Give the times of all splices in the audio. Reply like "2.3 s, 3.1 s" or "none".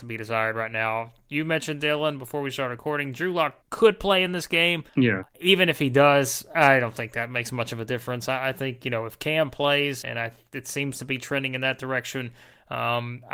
3.6 s, 4.9 s, 10.0 s